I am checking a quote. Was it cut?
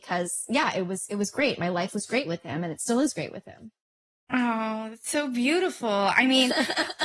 no; 0 cuts

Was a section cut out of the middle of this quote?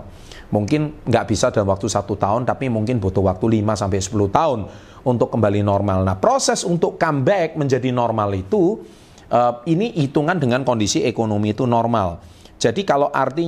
no; 0 cuts

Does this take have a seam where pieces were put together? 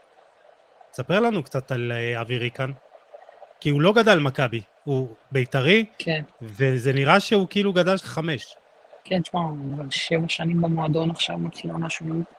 yes; 2 cuts; at 8.0 s, 9.0 s

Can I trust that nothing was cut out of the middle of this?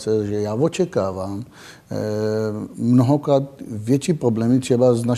yes; 0 cuts

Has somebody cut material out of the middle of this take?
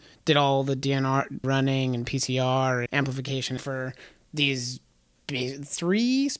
yes; 3 cuts; at 1.4 s, 2.9 s, 3.6 s

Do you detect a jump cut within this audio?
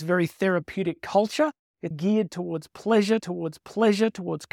yes; 2 cuts; at 1.9 s, 3.2 s

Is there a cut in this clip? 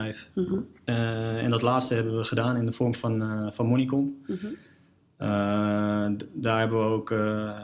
no; 0 cuts

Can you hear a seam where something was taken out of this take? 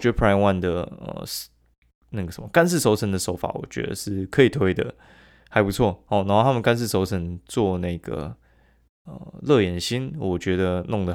no; 0 cuts

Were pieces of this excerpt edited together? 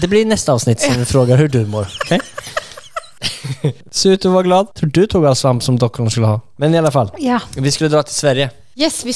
no; 0 cuts

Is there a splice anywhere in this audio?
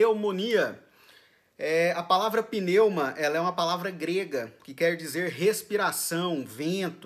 no; 0 cuts

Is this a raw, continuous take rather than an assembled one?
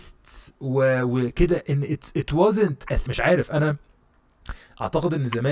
no; 1 cut; at 3.1 s

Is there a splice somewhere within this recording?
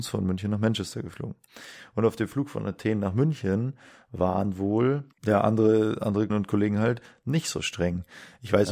yes; 2 cuts; at 5.1 s, 6.3 s

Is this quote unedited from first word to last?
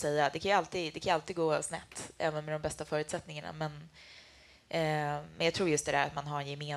yes; 0 cuts

